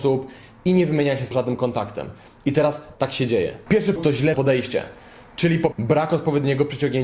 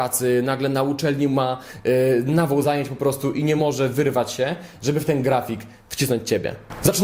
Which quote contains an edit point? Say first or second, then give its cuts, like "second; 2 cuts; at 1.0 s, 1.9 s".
first; 5 cuts; at 1.3 s, 2.9 s, 4.0 s, 4.3 s, 5.7 s